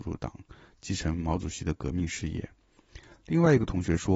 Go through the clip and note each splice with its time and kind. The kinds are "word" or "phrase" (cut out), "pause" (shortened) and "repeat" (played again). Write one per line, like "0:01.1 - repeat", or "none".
none